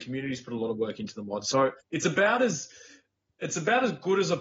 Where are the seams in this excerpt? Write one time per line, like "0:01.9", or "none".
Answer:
0:01.8